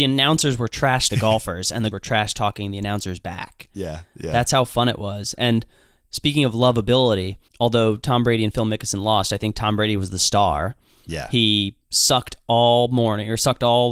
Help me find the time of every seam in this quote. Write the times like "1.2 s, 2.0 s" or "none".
1.1 s, 1.9 s, 7.5 s

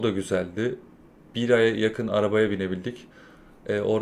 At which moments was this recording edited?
none

